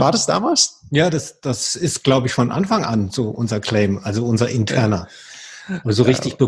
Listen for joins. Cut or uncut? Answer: uncut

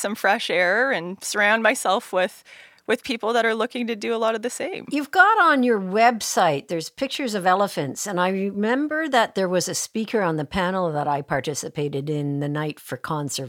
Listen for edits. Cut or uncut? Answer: uncut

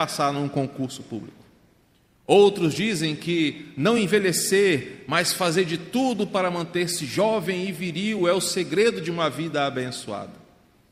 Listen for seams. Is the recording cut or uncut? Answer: uncut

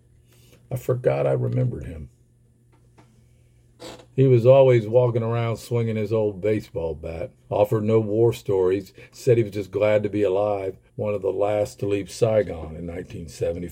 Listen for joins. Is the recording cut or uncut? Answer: cut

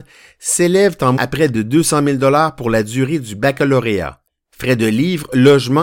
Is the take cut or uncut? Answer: cut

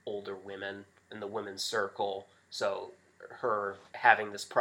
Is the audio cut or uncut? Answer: cut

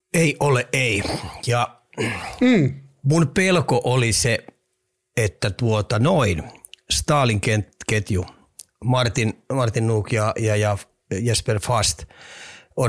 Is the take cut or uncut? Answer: uncut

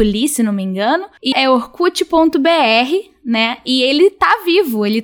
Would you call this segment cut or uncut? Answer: cut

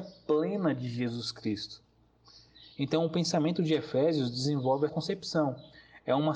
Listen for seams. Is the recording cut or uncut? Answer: cut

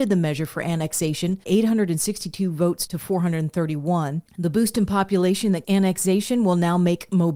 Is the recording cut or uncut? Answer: cut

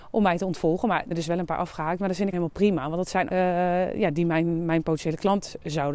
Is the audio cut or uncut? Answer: cut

